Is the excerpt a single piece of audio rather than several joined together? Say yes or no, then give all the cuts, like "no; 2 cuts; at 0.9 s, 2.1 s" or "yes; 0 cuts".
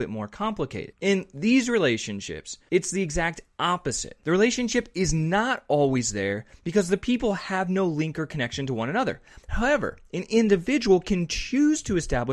yes; 0 cuts